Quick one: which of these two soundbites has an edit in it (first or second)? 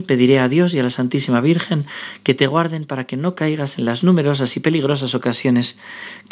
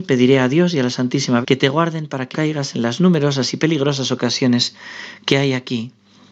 second